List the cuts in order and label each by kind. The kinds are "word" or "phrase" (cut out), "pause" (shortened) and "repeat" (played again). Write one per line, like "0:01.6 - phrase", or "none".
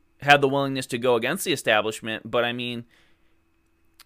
none